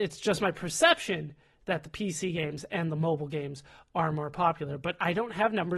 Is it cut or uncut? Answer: uncut